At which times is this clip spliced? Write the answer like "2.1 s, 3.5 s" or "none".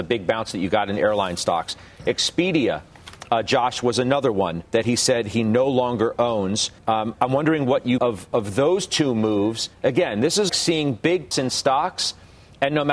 4.6 s, 6.8 s, 8.0 s, 9.7 s, 10.5 s, 11.3 s